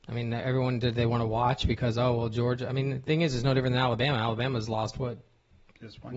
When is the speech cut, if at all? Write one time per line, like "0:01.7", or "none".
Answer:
none